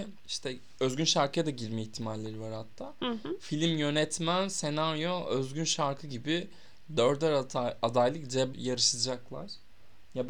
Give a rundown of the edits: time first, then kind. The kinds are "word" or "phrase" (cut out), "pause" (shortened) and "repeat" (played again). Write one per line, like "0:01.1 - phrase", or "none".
0:08.5 - word